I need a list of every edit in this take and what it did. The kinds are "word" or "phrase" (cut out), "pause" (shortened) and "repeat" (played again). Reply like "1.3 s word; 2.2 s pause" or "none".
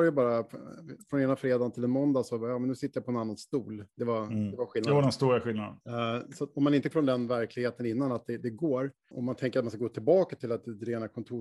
5.8 s pause; 6.9 s word; 9.1 s word